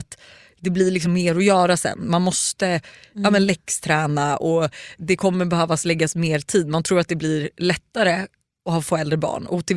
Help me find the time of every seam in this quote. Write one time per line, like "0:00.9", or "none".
none